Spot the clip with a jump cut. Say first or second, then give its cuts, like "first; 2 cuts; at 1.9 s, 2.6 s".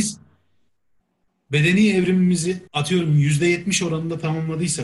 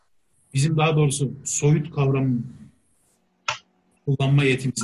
first; 1 cut; at 2.7 s